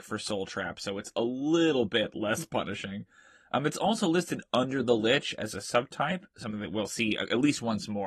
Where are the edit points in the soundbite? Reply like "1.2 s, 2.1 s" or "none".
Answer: none